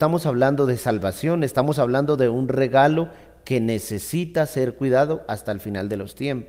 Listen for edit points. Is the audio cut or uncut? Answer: uncut